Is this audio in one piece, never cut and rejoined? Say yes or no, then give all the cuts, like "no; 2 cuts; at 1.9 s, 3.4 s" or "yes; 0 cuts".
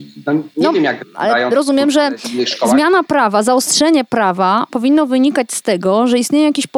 yes; 0 cuts